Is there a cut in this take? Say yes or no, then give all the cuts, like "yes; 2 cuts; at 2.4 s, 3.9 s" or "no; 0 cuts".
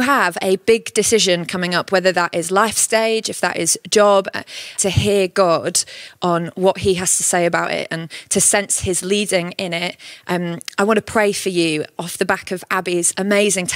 yes; 1 cut; at 4.8 s